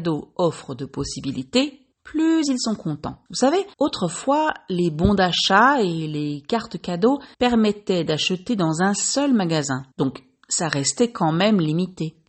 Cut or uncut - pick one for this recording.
cut